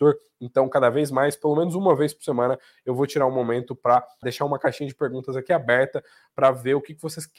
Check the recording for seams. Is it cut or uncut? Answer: cut